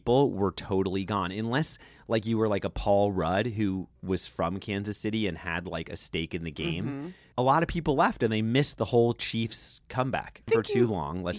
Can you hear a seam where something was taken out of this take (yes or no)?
no